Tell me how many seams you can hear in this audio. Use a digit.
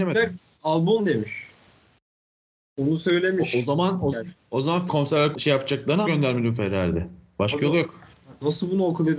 5